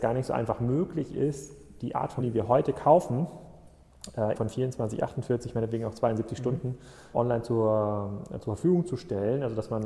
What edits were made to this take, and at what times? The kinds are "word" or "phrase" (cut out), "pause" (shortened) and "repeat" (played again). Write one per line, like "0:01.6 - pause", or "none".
0:02.2 - word
0:04.3 - word
0:07.1 - word